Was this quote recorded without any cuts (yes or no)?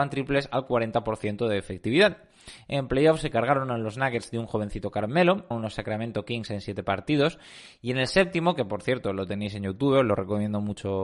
no